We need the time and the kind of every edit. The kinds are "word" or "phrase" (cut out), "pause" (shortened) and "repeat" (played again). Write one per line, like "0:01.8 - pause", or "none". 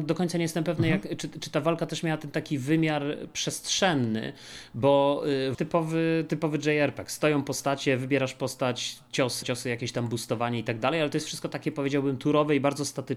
0:05.5 - phrase
0:09.4 - phrase